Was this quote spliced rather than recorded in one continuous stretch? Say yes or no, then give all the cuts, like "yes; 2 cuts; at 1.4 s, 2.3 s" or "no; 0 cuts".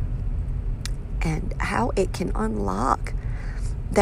no; 0 cuts